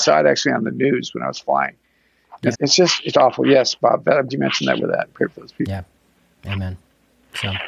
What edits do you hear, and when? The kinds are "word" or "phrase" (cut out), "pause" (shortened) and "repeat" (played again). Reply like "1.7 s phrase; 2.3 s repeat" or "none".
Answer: 2.5 s word; 3.1 s word; 4.3 s word; 4.8 s phrase